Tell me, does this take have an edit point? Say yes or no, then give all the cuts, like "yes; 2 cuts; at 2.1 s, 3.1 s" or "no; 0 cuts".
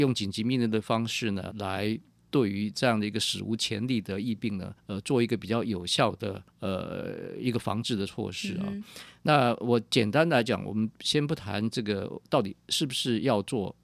yes; 3 cuts; at 1.5 s, 4.8 s, 6.5 s